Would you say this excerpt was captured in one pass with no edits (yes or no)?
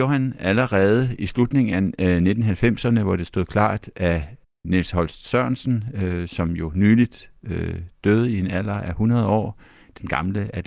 yes